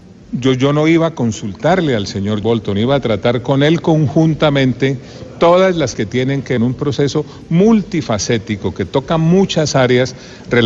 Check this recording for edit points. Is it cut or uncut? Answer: cut